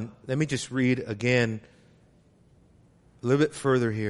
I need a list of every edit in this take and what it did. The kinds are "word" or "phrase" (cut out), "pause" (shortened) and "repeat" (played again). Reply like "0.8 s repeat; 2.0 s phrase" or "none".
none